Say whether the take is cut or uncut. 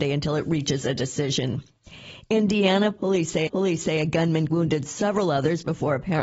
cut